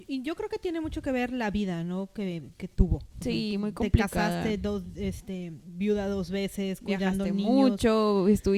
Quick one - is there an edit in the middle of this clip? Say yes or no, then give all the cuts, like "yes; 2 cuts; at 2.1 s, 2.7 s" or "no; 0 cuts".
no; 0 cuts